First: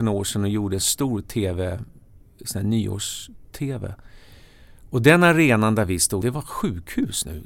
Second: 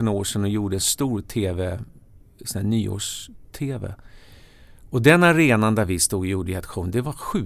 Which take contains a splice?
first; 1 cut; at 6.2 s

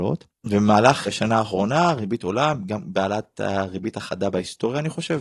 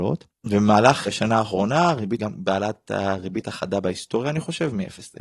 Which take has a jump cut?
second; 1 cut; at 2.2 s

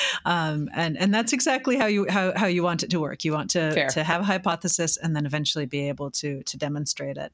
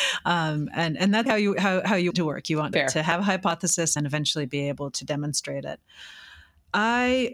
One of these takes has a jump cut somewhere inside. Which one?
second; 5 cuts; at 1.3 s, 2.1 s, 2.7 s, 4.0 s, 4.9 s

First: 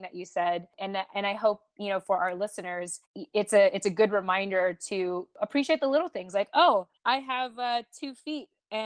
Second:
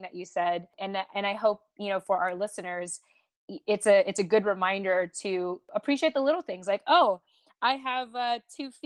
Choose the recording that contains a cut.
first; 2 cuts; at 3.1 s, 7.0 s

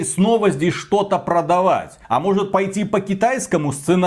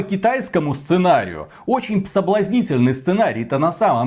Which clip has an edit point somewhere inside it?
first; 1 cut; at 2.0 s

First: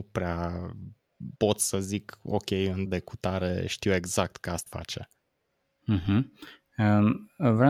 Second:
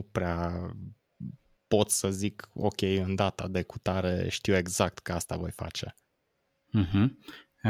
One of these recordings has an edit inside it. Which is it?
first; 3 cuts; at 1.4 s, 2.9 s, 4.7 s

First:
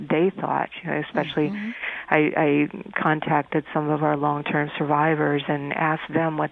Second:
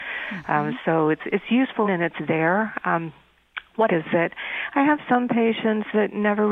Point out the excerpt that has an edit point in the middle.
second; 2 cuts; at 1.8 s, 3.9 s

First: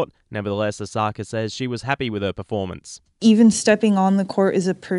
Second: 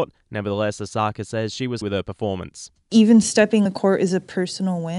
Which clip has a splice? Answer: second; 2 cuts; at 1.8 s, 3.7 s

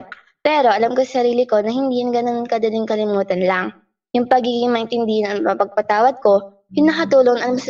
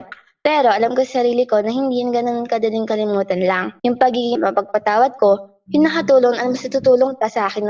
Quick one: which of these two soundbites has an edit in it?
second; 2 cuts; at 3.8 s, 4.3 s

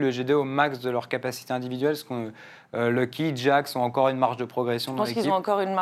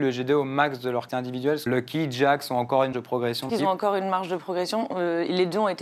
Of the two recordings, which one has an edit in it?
second; 4 cuts; at 1.1 s, 1.7 s, 2.9 s, 3.5 s

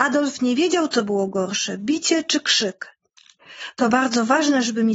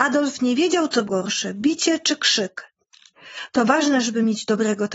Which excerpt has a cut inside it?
second; 2 cuts; at 1.1 s, 3.7 s

